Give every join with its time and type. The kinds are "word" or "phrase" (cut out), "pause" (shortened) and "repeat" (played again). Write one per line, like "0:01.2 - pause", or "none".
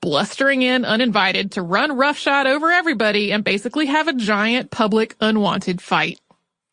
none